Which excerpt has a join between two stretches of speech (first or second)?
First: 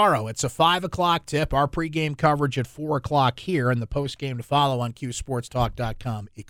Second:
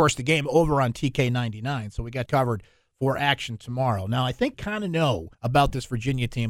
second